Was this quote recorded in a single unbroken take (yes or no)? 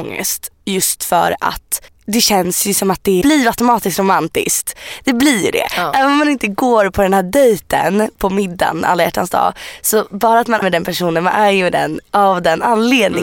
no